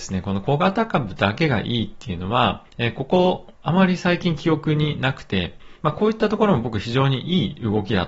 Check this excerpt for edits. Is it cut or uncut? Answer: cut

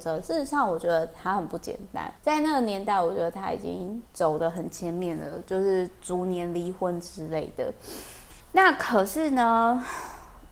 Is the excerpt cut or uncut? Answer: cut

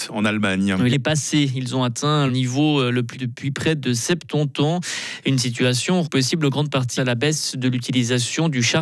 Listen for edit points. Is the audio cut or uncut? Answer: cut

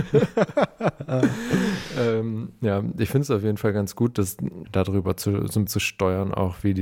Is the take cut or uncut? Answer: cut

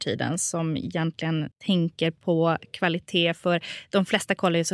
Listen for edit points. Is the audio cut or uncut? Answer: cut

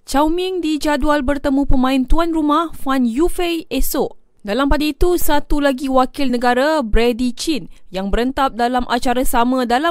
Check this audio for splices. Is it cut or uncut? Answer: uncut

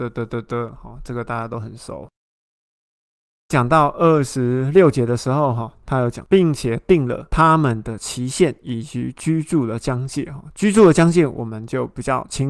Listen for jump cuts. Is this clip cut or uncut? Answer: uncut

